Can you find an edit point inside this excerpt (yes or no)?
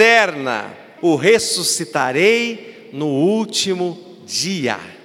yes